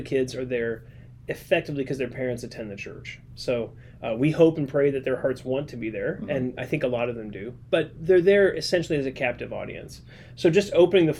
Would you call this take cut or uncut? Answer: uncut